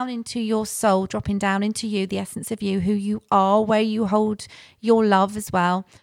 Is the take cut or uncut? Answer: uncut